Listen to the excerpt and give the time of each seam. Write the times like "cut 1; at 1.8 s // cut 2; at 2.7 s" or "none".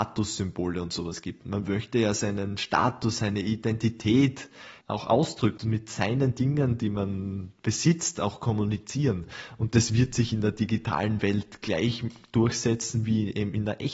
cut 1; at 4.8 s // cut 2; at 5.6 s